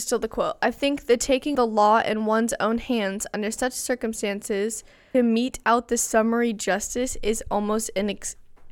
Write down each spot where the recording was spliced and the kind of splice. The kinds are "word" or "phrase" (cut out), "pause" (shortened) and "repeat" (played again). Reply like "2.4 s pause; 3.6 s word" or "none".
1.5 s word; 5.1 s word